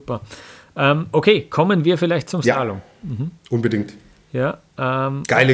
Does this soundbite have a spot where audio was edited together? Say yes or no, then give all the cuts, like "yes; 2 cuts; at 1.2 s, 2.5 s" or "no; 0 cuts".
no; 0 cuts